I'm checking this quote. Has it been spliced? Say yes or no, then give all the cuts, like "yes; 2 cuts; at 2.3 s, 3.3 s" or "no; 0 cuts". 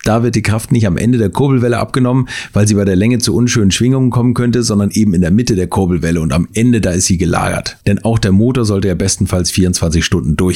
no; 0 cuts